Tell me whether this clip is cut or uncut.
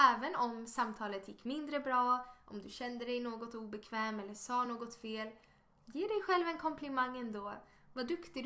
uncut